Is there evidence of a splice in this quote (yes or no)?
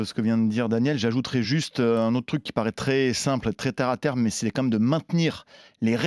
no